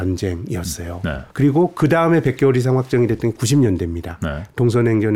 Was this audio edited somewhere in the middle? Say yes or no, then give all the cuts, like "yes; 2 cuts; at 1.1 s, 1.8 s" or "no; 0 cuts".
yes; 1 cut; at 1.3 s